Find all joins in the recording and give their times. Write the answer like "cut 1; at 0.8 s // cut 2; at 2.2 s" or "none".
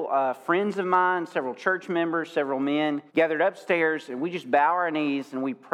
cut 1; at 3.1 s